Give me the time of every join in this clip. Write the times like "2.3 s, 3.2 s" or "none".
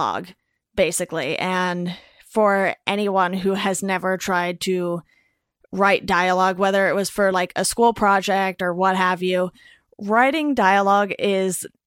none